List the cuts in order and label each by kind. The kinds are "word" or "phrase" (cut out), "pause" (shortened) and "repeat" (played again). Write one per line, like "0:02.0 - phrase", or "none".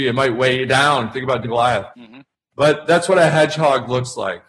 0:01.4 - word
0:01.9 - pause